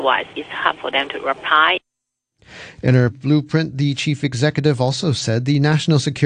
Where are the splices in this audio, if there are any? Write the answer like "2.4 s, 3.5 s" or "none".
3.1 s

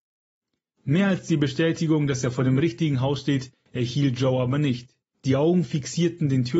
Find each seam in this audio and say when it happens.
5.1 s

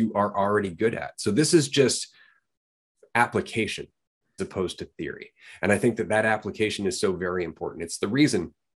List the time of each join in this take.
4.4 s

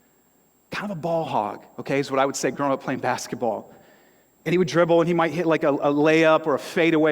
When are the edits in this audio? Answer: none

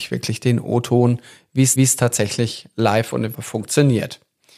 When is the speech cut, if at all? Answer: 1.8 s, 3.3 s

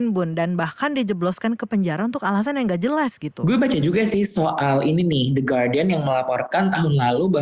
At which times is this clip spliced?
none

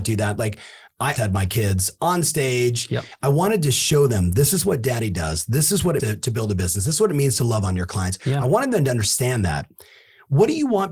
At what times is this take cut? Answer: 1.2 s, 6.0 s

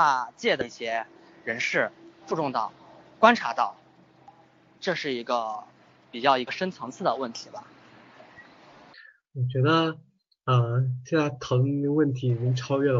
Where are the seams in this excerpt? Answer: 2.2 s

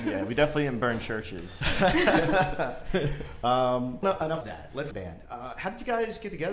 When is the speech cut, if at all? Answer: 4.0 s, 4.4 s, 4.9 s

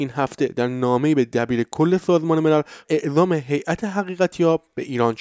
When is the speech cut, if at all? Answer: 2.8 s

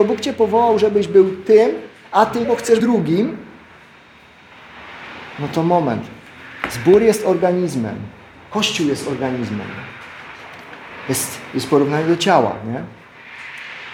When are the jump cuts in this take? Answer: 2.4 s, 2.8 s

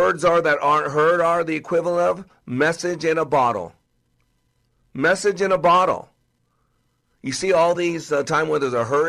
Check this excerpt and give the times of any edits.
none

